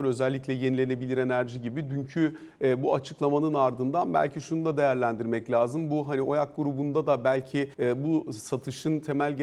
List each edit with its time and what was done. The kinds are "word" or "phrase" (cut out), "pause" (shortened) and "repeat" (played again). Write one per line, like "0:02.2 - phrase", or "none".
0:07.7 - pause